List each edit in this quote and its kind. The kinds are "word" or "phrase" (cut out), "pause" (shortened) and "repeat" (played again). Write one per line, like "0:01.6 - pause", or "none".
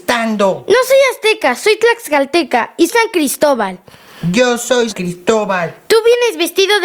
0:02.9 - word
0:04.9 - word